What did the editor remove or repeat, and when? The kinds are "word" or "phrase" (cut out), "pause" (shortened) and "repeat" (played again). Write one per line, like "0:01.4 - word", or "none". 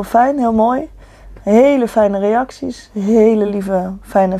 none